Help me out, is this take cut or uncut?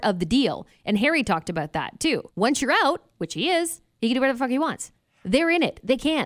cut